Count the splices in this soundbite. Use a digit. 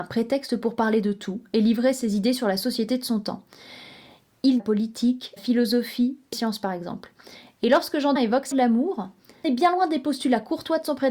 6